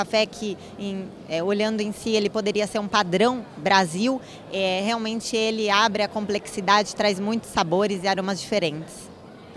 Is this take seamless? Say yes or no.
yes